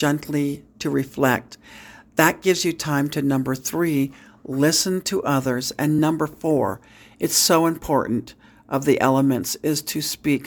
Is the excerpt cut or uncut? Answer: uncut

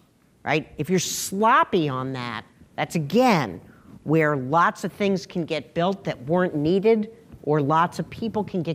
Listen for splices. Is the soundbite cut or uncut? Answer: cut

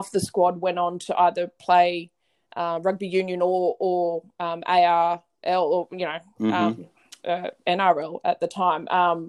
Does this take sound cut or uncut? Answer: uncut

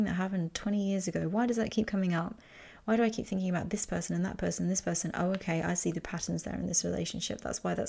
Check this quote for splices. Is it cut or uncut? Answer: uncut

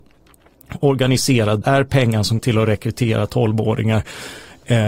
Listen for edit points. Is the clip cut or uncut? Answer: cut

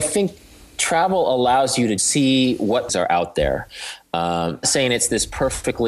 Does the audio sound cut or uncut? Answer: cut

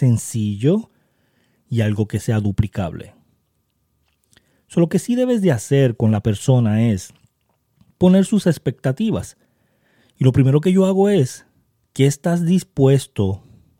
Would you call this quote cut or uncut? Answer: uncut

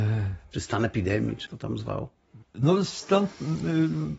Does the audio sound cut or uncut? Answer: cut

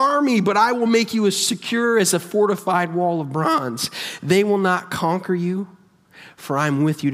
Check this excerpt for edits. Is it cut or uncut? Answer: uncut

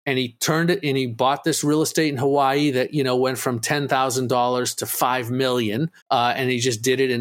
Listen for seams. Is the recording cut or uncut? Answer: cut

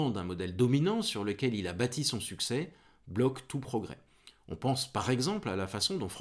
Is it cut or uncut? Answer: uncut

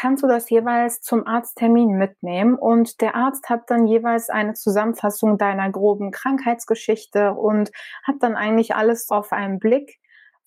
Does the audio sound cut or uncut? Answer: cut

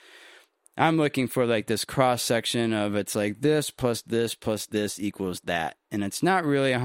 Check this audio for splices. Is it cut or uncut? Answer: uncut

